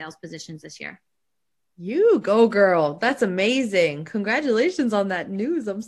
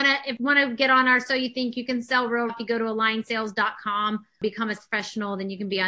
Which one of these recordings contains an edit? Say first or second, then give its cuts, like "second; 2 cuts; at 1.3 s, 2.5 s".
second; 2 cuts; at 2.5 s, 4.8 s